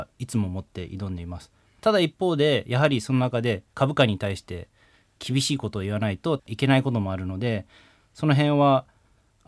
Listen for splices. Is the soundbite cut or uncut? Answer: uncut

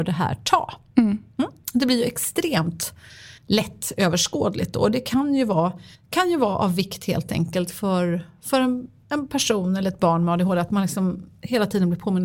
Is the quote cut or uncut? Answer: cut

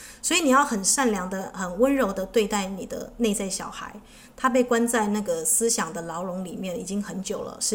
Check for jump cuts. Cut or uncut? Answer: uncut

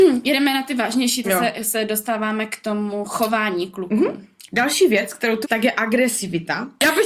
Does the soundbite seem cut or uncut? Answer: cut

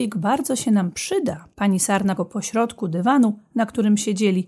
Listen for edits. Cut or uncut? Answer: cut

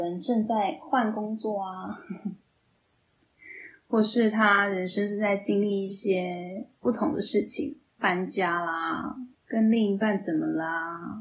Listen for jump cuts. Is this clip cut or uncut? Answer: cut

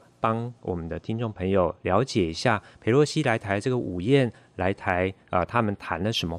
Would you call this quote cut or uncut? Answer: uncut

